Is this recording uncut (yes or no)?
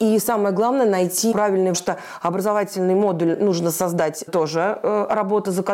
no